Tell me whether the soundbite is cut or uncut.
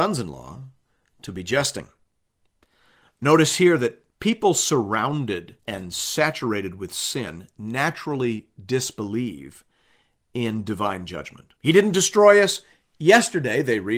cut